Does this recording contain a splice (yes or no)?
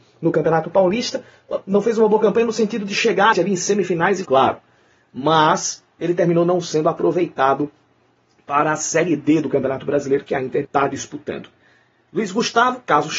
yes